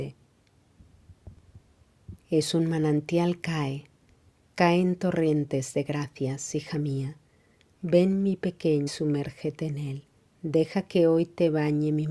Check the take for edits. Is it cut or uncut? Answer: cut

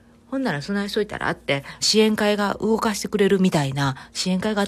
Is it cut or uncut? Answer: cut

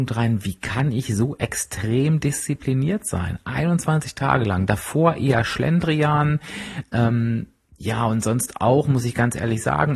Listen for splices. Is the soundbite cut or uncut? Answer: uncut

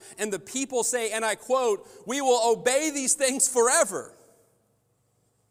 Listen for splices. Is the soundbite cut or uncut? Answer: uncut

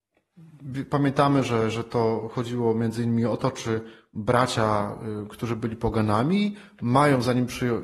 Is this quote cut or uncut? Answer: uncut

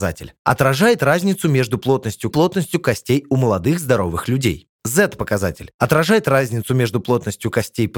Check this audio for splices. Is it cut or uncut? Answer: cut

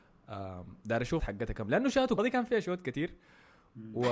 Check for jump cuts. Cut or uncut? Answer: cut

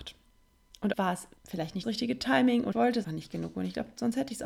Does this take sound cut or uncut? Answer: cut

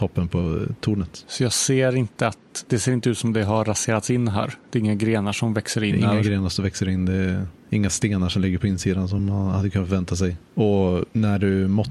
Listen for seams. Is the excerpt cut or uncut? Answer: uncut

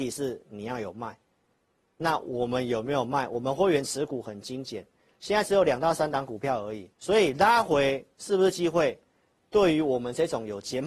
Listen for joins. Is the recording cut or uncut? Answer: cut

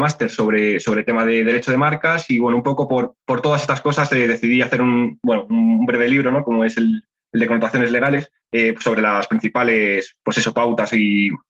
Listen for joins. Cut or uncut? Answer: cut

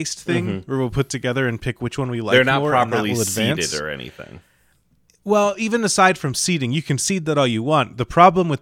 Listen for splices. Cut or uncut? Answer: uncut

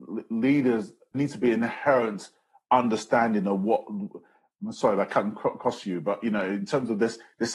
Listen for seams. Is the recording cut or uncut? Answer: cut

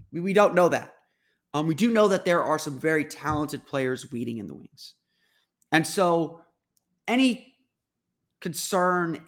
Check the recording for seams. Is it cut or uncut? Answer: uncut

